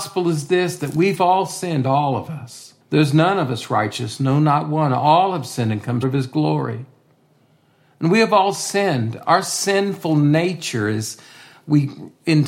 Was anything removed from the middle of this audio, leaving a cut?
yes; 2 cuts; at 2.8 s, 6.0 s

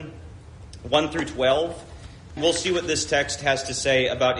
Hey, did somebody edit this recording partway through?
yes; 1 cut; at 2.4 s

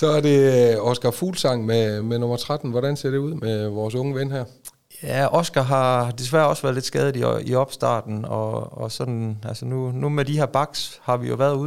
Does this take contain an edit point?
no; 0 cuts

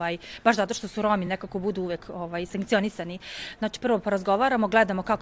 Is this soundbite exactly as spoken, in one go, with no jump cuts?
yes; 0 cuts

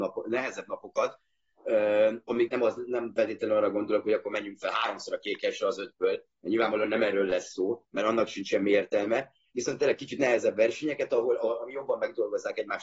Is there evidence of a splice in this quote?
yes; 2 cuts; at 2.5 s, 9.5 s

